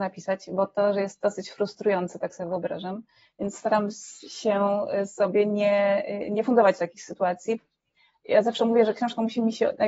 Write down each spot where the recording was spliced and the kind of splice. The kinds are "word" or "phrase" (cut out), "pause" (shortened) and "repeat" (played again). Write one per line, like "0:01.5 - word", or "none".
none